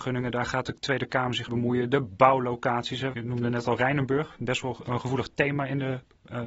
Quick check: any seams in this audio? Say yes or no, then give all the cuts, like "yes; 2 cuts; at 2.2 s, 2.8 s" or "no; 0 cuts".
yes; 2 cuts; at 1.5 s, 3.1 s